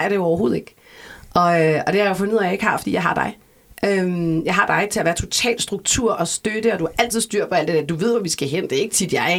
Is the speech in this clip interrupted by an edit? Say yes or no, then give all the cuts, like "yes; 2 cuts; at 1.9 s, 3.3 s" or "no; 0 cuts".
no; 0 cuts